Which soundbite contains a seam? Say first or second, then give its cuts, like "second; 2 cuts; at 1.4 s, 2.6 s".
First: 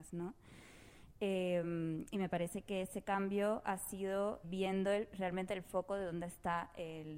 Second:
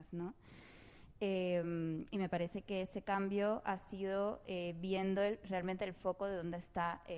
first; 1 cut; at 4.4 s